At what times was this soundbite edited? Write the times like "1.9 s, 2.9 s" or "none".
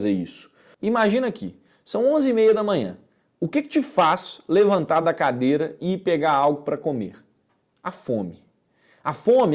none